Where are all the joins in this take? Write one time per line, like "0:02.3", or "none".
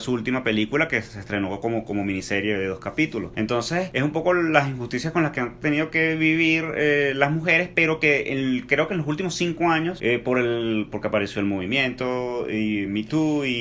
none